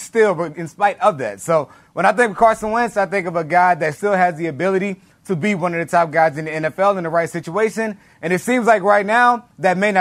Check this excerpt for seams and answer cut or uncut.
uncut